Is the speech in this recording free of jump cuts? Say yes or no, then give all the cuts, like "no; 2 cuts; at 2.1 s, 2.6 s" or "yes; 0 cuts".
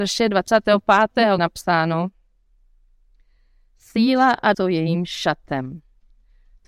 no; 2 cuts; at 1.4 s, 4.5 s